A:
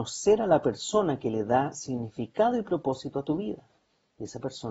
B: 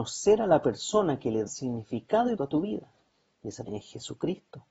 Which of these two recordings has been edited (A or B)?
B